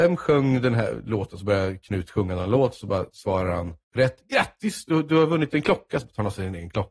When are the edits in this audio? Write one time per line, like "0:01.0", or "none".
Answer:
0:03.8

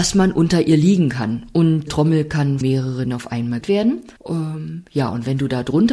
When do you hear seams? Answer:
0:01.9
0:02.6
0:03.0
0:03.6
0:04.2

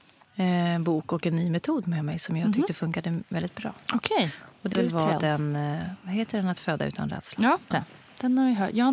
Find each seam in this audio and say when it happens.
0:04.7
0:07.7

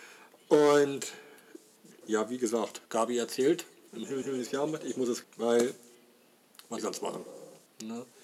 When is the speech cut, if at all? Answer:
0:02.0
0:02.8
0:03.9
0:04.2
0:05.2
0:06.8

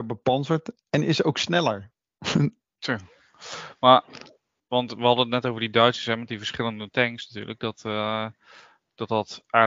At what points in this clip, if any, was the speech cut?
none

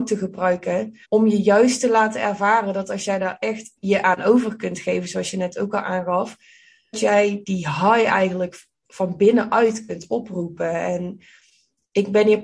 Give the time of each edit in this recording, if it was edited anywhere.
0:01.0
0:03.8
0:06.9
0:07.4

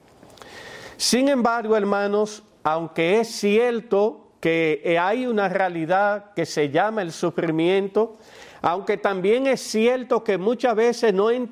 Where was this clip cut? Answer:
none

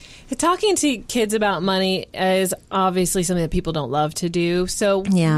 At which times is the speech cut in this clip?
none

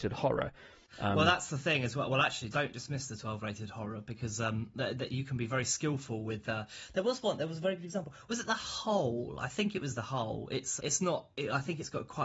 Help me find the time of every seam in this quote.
0:02.5
0:10.8

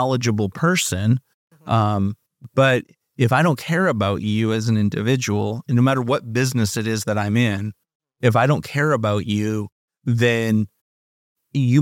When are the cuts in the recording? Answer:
none

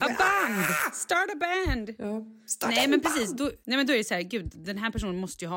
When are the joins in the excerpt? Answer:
0:03.6

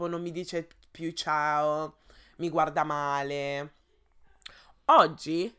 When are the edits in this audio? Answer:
none

